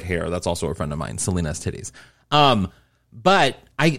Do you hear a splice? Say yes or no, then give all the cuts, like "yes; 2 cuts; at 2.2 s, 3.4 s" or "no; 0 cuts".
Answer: no; 0 cuts